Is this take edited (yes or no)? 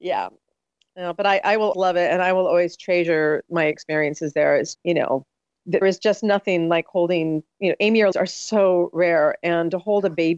yes